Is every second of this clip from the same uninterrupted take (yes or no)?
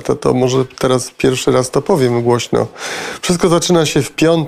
yes